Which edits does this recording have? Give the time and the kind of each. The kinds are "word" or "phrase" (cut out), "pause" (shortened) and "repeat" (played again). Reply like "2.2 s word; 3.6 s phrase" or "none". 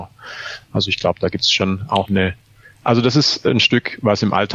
none